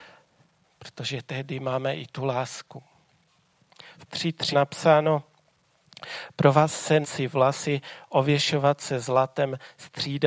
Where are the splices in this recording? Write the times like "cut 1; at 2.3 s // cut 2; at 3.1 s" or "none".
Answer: cut 1; at 4.1 s // cut 2; at 4.5 s // cut 3; at 7.0 s